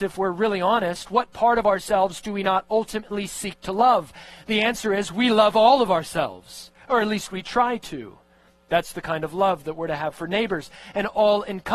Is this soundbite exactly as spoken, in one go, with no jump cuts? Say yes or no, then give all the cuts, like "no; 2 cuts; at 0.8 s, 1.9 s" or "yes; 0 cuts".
yes; 0 cuts